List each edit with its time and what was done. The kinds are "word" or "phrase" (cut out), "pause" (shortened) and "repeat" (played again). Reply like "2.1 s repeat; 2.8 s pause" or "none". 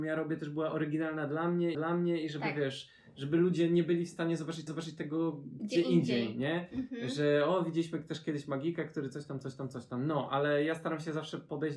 1.7 s repeat; 4.7 s repeat

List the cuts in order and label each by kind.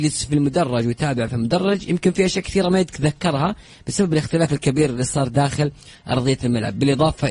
none

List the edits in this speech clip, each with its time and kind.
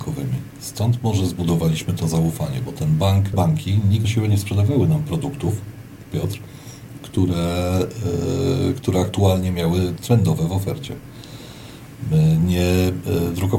3.3 s phrase; 4.0 s word

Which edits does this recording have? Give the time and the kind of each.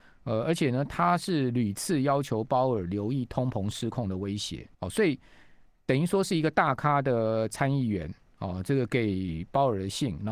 4.7 s pause

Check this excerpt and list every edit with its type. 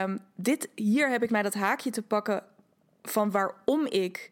1.3 s word

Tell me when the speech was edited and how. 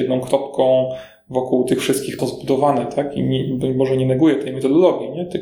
2.2 s phrase

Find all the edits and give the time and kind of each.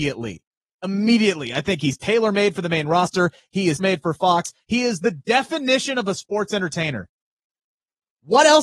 3.8 s word

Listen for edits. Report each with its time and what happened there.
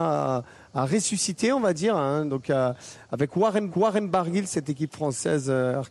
3.7 s repeat

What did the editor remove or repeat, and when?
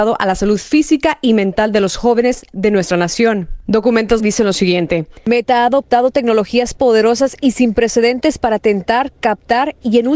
4.2 s phrase

